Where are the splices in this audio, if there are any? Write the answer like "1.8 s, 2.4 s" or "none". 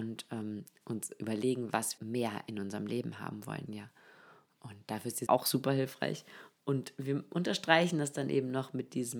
2.0 s, 3.7 s, 5.3 s